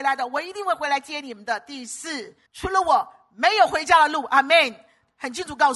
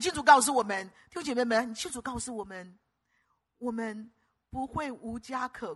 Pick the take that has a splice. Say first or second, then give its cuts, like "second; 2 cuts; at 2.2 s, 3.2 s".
first; 1 cut; at 2.5 s